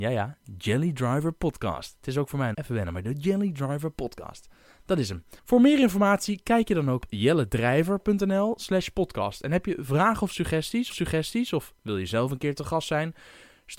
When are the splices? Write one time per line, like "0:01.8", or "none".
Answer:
0:02.5
0:05.4
0:07.0
0:10.9

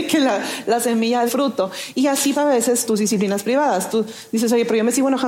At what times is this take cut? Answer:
0:01.3
0:02.3
0:02.8

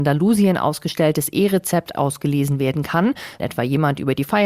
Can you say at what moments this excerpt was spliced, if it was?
0:01.9
0:03.4

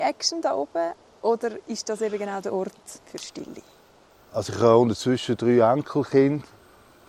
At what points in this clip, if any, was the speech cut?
0:03.0

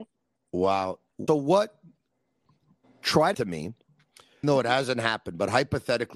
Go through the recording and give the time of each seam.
0:01.3
0:03.3
0:04.4

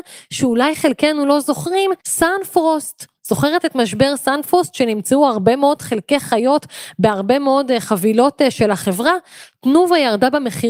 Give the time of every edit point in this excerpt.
0:02.0

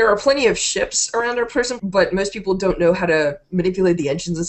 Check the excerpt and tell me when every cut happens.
0:01.8

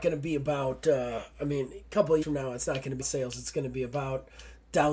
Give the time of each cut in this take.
0:02.2
0:03.0

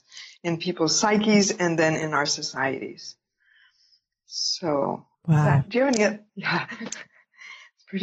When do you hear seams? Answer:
0:05.1
0:06.3

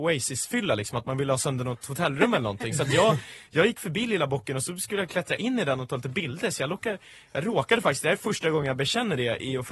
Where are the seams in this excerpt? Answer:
none

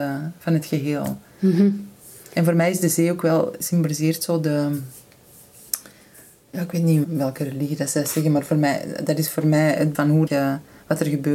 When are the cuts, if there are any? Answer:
0:07.0
0:09.9
0:10.3

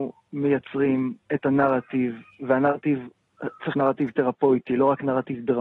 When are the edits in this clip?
0:03.7

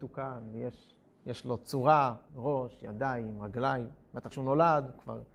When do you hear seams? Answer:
0:02.3
0:04.3

